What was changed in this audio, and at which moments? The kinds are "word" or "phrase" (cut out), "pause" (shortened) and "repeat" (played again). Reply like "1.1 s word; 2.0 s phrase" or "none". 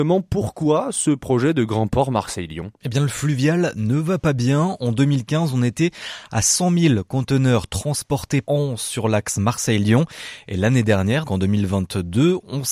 8.4 s word; 11.2 s word